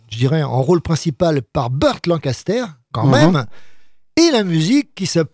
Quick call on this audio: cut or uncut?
uncut